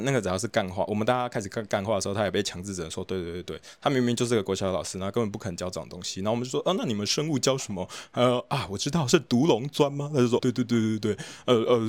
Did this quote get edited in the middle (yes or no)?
yes